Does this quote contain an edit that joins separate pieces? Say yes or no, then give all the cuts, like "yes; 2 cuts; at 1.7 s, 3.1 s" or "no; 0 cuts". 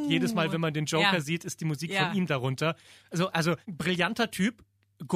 yes; 1 cut; at 3.6 s